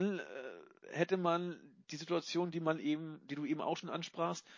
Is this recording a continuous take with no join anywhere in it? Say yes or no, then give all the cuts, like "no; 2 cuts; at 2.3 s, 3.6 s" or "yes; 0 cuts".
yes; 0 cuts